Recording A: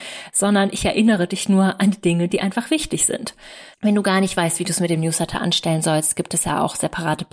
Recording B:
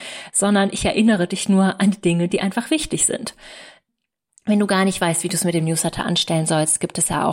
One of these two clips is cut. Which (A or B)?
A